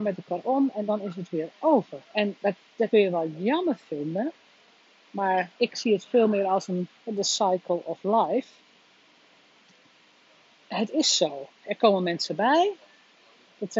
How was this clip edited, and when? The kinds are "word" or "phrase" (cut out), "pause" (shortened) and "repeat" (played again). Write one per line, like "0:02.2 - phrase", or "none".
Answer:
0:02.0 - pause
0:02.9 - phrase
0:05.5 - pause
0:07.0 - pause